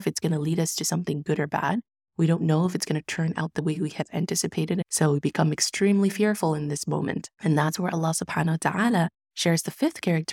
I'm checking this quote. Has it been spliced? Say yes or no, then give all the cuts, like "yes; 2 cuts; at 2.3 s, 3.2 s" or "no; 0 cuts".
no; 0 cuts